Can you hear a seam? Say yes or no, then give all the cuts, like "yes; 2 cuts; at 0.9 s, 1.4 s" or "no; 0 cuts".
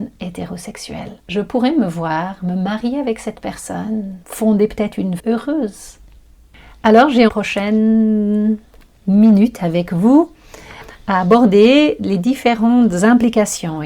yes; 4 cuts; at 1.2 s, 4.2 s, 5.2 s, 7.3 s